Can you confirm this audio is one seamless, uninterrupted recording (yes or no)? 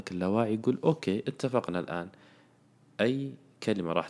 yes